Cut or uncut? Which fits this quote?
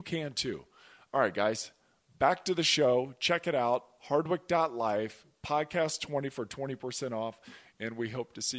uncut